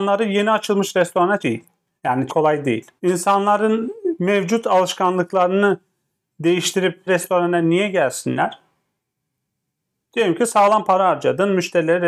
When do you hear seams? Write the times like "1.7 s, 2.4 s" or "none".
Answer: 1.4 s, 2.3 s, 3.0 s, 7.1 s